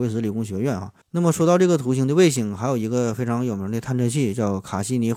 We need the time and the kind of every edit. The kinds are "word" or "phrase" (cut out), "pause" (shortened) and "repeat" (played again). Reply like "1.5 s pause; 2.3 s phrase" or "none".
1.0 s pause